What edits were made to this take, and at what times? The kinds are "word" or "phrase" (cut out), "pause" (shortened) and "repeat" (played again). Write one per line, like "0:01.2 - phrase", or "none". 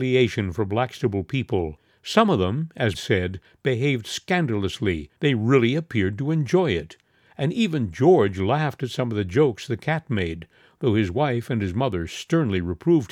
0:02.9 - phrase
0:05.2 - pause

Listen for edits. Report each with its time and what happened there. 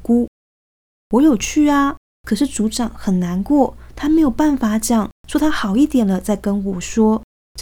0:05.2 - pause

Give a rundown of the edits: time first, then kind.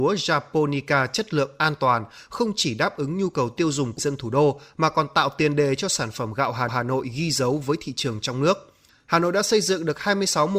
0:04.0 - word
0:06.7 - repeat
0:08.9 - pause

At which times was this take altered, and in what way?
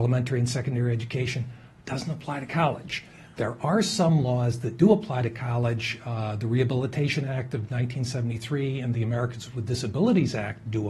none

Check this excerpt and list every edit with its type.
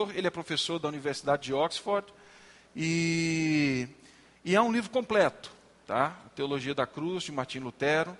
none

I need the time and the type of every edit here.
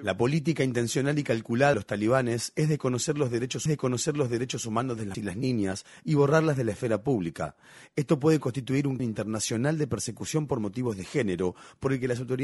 0:01.7 - word
0:03.7 - repeat
0:05.1 - word
0:09.0 - word

